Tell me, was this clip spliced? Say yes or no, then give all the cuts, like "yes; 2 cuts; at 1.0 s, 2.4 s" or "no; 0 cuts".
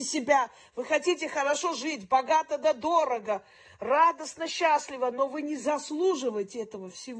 no; 0 cuts